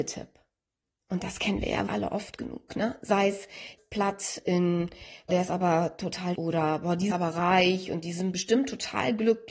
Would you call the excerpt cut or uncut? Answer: cut